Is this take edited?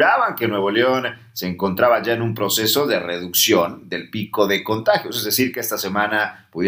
no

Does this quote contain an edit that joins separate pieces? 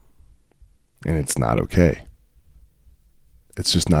no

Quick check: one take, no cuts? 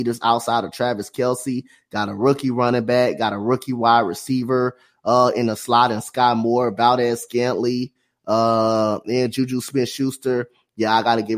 yes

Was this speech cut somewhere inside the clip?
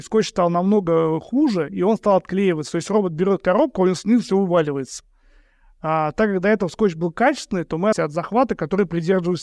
yes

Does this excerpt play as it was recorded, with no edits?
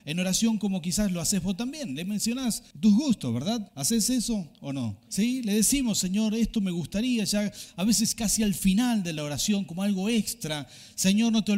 no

